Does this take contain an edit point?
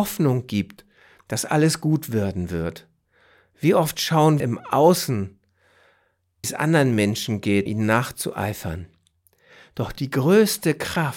yes; 3 cuts; at 4.4 s, 6.4 s, 7.7 s

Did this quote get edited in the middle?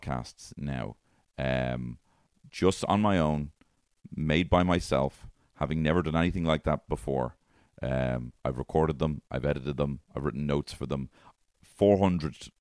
yes; 1 cut; at 8.4 s

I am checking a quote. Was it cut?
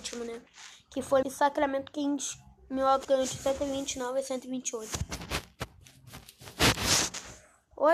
yes; 2 cuts; at 1.2 s, 3.0 s

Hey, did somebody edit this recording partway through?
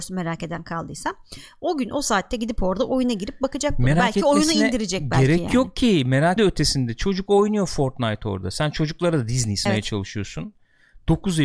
yes; 2 cuts; at 6.4 s, 9.7 s

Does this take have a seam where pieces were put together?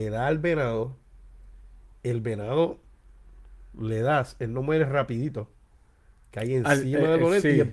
no; 0 cuts

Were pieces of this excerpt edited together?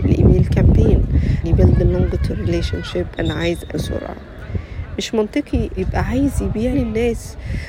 yes; 6 cuts; at 1.4 s, 2.3 s, 3.2 s, 3.7 s, 5.8 s, 6.7 s

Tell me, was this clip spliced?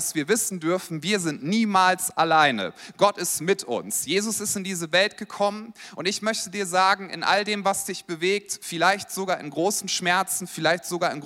no; 0 cuts

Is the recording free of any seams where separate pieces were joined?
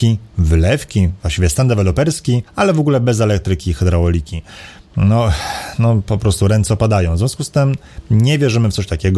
no; 1 cut; at 2.5 s

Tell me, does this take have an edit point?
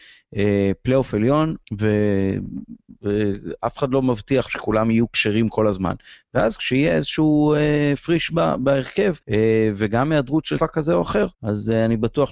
yes; 6 cuts; at 1.6 s, 4.5 s, 8.3 s, 9.2 s, 10.6 s, 11.3 s

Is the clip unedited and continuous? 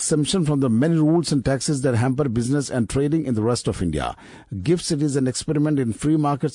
yes; 0 cuts

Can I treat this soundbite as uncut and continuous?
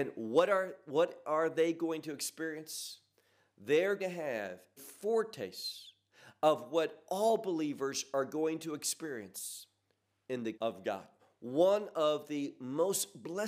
no; 4 cuts; at 4.0 s, 4.8 s, 10.5 s, 11.2 s

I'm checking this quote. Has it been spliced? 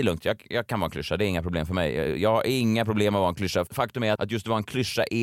yes; 1 cut; at 4.1 s

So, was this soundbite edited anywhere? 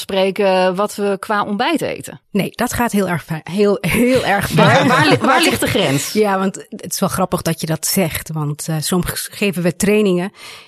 yes; 1 cut; at 2.2 s

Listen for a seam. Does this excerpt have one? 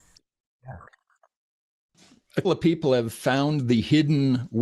yes; 1 cut; at 2.4 s

